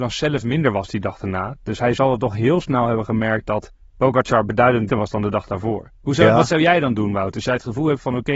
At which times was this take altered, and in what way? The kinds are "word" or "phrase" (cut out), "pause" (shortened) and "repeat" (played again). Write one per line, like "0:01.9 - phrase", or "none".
0:04.9 - word
0:05.9 - pause

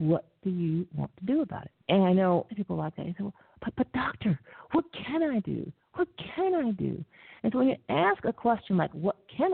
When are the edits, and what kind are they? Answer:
0:01.8 - pause
0:02.5 - phrase
0:07.4 - pause

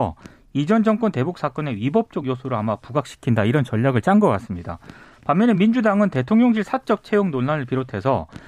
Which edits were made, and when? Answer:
none

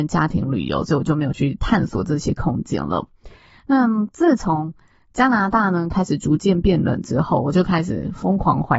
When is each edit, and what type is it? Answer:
none

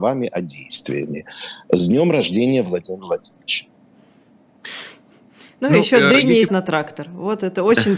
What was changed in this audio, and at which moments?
0:06.5 - word

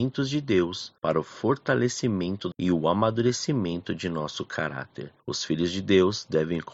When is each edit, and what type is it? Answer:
0:01.0 - pause
0:02.5 - phrase
0:05.2 - pause

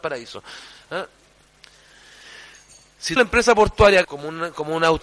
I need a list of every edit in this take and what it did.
0:03.2 - word
0:04.0 - word

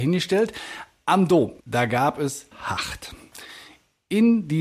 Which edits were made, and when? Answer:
0:01.6 - pause
0:02.5 - word

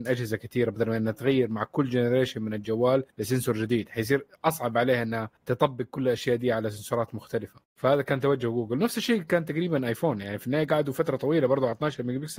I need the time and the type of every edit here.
0:03.1 - pause
0:05.4 - pause

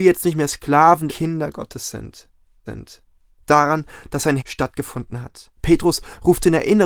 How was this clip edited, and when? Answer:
0:01.1 - phrase
0:02.7 - repeat
0:04.4 - word
0:05.5 - pause

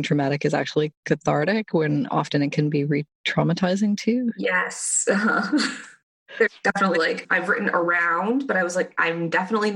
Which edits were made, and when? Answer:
0:06.9 - phrase

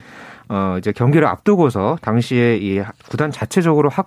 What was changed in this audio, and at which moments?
none

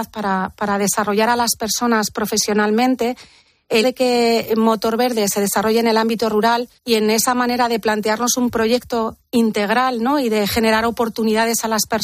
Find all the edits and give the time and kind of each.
0:03.8 - word
0:06.8 - pause

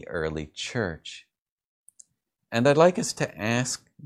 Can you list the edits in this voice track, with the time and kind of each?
none

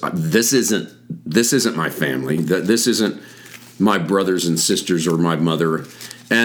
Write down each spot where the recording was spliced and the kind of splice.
none

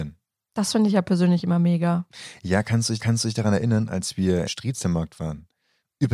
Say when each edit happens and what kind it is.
0:03.0 - repeat
0:04.5 - phrase

